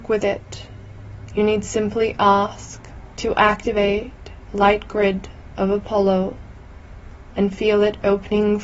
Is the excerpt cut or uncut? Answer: cut